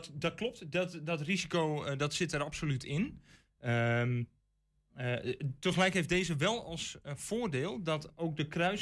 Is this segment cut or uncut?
uncut